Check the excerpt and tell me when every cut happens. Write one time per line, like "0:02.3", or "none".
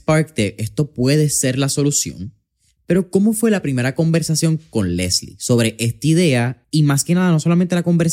0:06.6